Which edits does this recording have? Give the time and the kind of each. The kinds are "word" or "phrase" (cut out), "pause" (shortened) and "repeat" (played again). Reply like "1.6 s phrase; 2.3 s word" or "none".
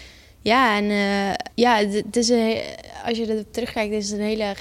1.5 s pause